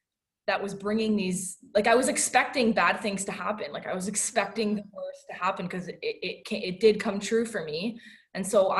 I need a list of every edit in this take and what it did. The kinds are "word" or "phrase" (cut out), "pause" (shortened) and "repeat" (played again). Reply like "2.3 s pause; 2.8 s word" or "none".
none

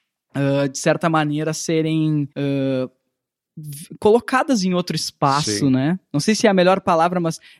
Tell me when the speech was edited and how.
2.3 s pause

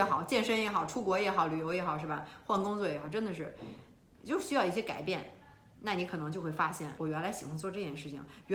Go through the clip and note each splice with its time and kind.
7.0 s word

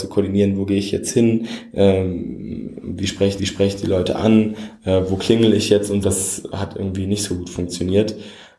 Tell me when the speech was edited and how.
3.4 s repeat; 6.0 s word; 6.5 s word

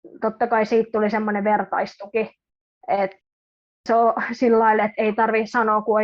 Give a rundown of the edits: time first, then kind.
none

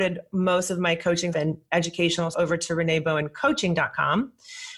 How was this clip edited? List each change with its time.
1.3 s word; 2.3 s word

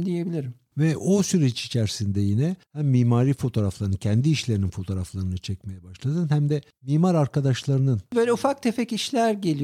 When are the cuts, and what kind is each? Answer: none

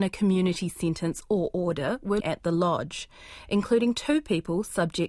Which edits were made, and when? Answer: 2.2 s word

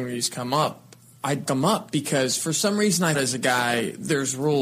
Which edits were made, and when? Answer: 1.5 s word; 3.1 s word

